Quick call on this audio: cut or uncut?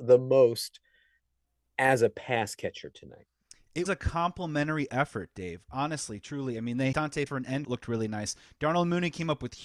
cut